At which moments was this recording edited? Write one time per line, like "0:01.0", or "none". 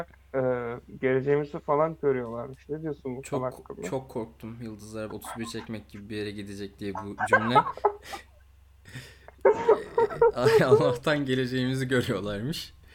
0:05.1